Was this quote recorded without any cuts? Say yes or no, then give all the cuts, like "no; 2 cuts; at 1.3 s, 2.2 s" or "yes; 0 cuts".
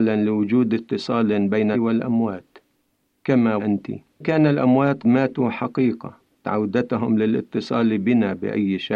no; 5 cuts; at 1.7 s, 3.6 s, 4.2 s, 5.0 s, 6.4 s